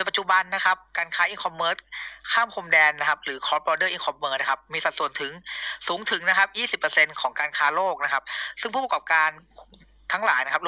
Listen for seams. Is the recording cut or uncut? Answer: uncut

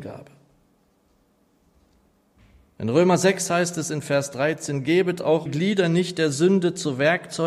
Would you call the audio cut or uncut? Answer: cut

